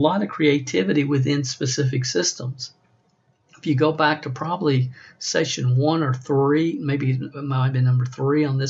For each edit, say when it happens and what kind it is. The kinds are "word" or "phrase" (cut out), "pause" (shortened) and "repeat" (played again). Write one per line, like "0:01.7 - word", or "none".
none